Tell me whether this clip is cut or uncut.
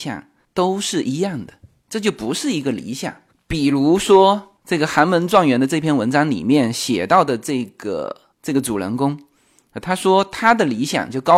uncut